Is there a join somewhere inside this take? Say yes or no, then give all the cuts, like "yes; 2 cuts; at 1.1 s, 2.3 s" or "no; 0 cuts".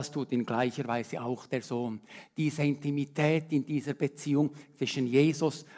no; 0 cuts